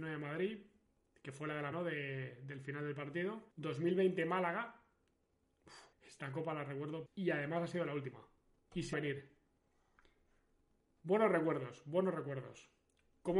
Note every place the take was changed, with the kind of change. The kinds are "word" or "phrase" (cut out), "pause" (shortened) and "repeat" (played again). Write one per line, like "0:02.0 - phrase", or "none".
0:01.7 - word
0:03.5 - pause
0:05.9 - pause
0:07.1 - word
0:08.5 - pause
0:08.9 - word